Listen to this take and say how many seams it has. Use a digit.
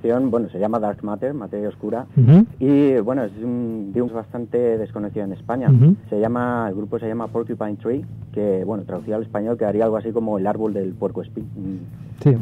4